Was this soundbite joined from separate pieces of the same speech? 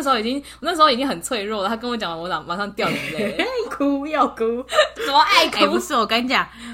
yes; 2 cuts; at 3.6 s, 4.9 s

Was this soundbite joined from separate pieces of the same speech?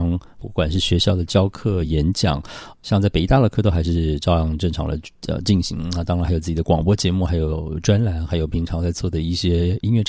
no; 0 cuts

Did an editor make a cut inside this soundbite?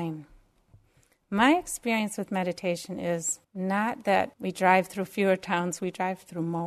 yes; 2 cuts; at 3.4 s, 4.3 s

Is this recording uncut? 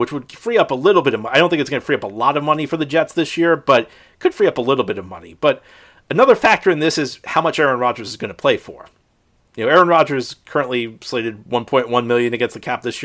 yes; 0 cuts

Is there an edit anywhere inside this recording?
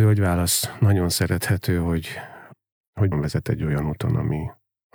yes; 1 cut; at 3.1 s

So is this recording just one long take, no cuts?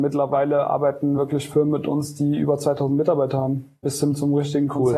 yes; 0 cuts

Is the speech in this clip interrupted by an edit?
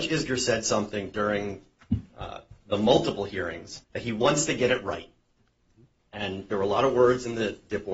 yes; 2 cuts; at 2.6 s, 3.8 s

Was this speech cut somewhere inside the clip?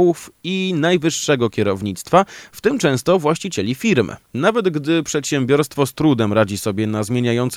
yes; 1 cut; at 4.2 s

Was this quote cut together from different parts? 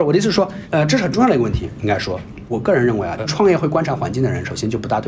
yes; 1 cut; at 3.2 s

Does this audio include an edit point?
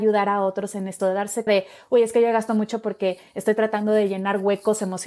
yes; 2 cuts; at 1.0 s, 1.5 s

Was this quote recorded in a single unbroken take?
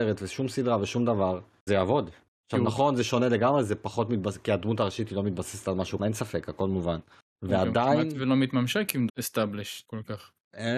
no; 3 cuts; at 1.7 s, 6.0 s, 9.1 s

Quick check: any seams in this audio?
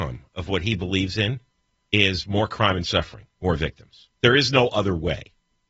yes; 2 cuts; at 1.7 s, 4.1 s

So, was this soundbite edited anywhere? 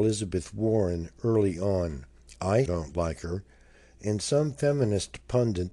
yes; 1 cut; at 2.7 s

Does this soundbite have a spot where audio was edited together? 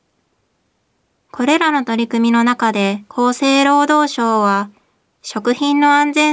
no; 0 cuts

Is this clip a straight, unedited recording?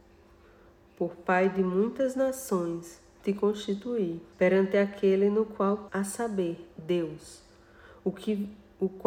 no; 2 cuts; at 4.3 s, 5.9 s

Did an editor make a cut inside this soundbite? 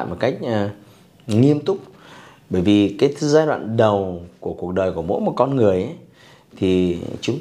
no; 0 cuts

